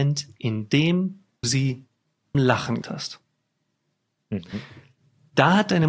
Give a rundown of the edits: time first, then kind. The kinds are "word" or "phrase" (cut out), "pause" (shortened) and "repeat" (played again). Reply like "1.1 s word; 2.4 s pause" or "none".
1.4 s word; 2.3 s word; 2.8 s word